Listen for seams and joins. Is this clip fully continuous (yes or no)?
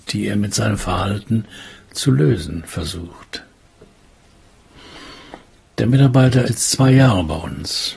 no